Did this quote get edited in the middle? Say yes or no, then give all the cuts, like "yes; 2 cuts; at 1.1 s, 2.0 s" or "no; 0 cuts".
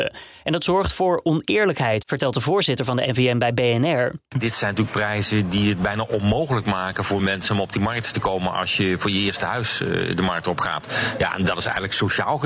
no; 0 cuts